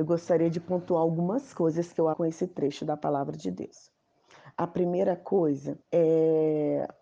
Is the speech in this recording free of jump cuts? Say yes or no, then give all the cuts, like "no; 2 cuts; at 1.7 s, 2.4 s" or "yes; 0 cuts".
no; 2 cuts; at 2.1 s, 5.8 s